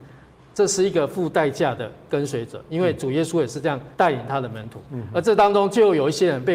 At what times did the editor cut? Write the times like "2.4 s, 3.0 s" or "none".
3.9 s

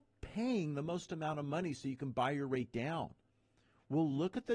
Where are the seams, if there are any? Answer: none

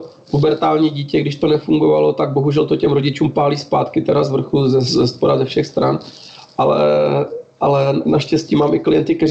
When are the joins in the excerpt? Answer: none

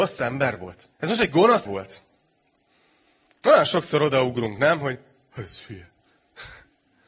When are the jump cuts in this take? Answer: 0.9 s, 1.7 s

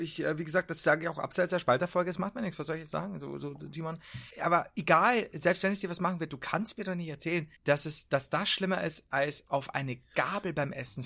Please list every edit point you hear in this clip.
4.3 s, 7.6 s

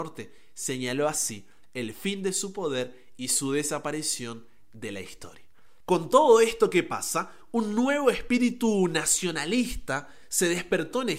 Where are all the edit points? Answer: none

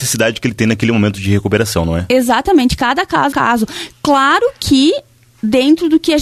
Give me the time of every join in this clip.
3.3 s

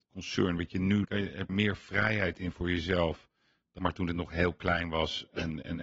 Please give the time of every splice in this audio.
1.0 s, 1.5 s, 3.8 s

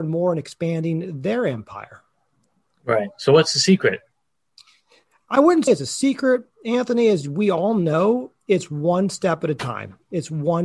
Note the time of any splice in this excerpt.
5.7 s

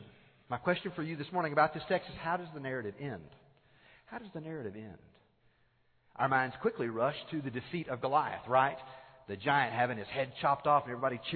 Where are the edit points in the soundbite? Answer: none

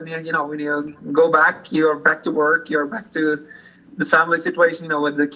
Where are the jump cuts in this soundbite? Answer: none

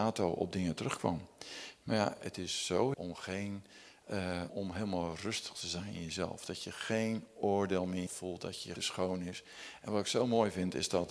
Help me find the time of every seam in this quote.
2.9 s, 4.5 s, 8.1 s, 8.8 s

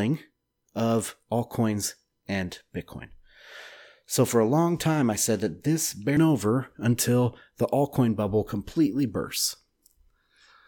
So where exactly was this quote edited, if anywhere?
6.2 s

